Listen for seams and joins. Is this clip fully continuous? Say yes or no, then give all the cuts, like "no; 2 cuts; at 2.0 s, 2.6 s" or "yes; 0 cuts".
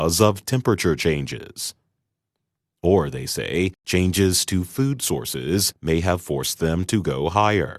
yes; 0 cuts